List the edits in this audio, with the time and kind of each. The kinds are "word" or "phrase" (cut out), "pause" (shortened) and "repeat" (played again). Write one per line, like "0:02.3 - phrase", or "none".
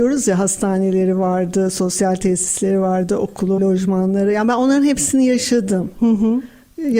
0:03.6 - word